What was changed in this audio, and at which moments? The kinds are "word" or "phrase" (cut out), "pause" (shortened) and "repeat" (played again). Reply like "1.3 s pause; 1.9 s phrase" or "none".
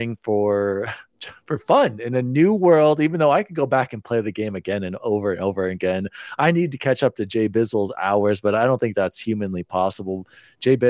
none